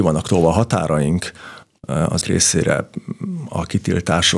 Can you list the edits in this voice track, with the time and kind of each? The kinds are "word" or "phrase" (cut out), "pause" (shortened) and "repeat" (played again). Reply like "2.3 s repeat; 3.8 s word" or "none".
2.2 s word